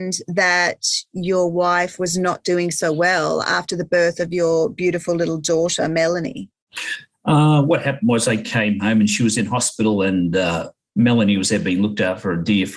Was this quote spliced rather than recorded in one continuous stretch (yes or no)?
no